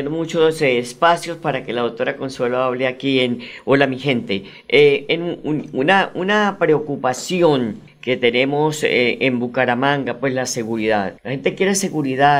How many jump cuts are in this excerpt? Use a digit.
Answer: 1